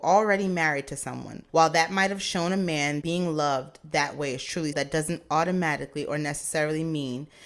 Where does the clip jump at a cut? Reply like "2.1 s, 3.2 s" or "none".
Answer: 1.5 s, 3.0 s, 4.7 s